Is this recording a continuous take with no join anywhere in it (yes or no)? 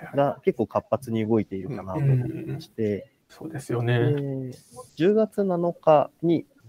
no